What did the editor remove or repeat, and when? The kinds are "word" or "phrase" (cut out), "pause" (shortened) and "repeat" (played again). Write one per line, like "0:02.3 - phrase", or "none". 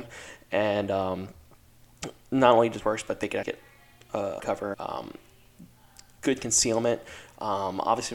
0:02.8 - word
0:03.4 - word
0:04.4 - word
0:04.7 - word